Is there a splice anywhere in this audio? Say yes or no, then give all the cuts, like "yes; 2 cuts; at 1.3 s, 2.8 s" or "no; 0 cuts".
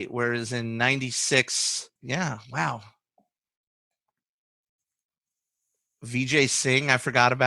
yes; 1 cut; at 2.0 s